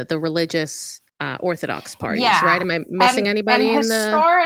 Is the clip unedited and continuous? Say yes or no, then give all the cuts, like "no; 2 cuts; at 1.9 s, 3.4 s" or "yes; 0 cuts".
no; 1 cut; at 1.1 s